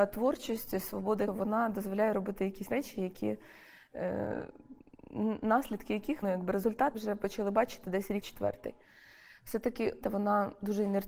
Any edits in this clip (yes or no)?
yes